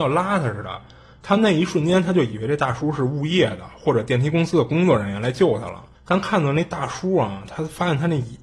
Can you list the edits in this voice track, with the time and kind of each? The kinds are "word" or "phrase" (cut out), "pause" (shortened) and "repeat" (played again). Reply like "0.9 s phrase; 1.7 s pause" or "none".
5.9 s pause